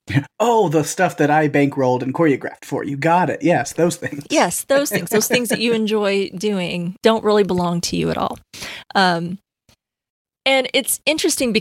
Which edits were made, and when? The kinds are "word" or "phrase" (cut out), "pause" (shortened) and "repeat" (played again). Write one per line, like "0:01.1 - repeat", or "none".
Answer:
0:07.0 - word